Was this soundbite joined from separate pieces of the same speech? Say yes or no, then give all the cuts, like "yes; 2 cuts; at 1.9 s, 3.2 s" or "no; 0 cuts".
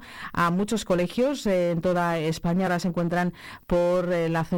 no; 0 cuts